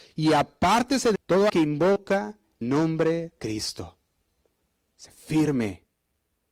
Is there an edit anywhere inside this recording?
yes; 4 cuts; at 1.1 s, 1.5 s, 2.6 s, 3.4 s

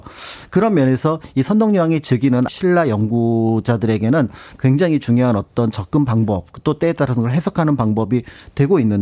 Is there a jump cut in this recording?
yes; 1 cut; at 2.5 s

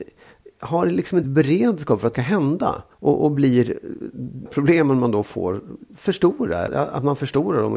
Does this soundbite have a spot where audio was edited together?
yes; 5 cuts; at 1.2 s, 2.1 s, 2.9 s, 4.5 s, 6.7 s

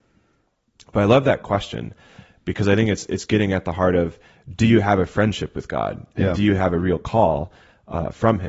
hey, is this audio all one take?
yes; 0 cuts

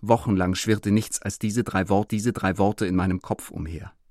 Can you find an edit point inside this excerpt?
yes; 2 cuts; at 1.2 s, 2.1 s

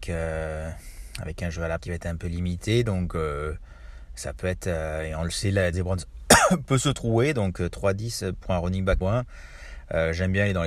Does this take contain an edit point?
yes; 3 cuts; at 1.8 s, 5.7 s, 9.0 s

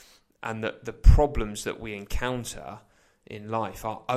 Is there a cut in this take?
no; 0 cuts

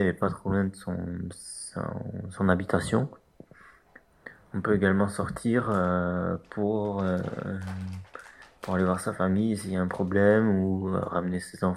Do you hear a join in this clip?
no; 0 cuts

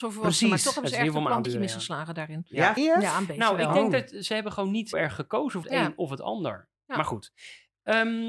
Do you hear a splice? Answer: yes; 5 cuts; at 1.4 s, 2.8 s, 4.9 s, 5.6 s, 6.8 s

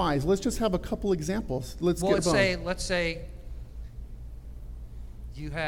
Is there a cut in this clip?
yes; 1 cut; at 2.2 s

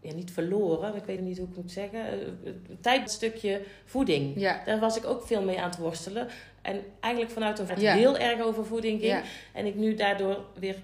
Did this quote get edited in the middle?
yes; 3 cuts; at 1.2 s, 3.1 s, 7.7 s

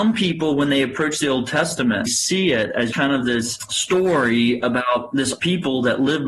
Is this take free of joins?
no; 2 cuts; at 2.1 s, 2.9 s

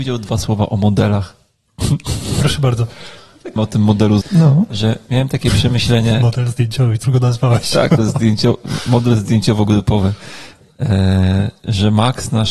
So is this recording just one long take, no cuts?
no; 4 cuts; at 3.6 s, 4.2 s, 7.0 s, 8.0 s

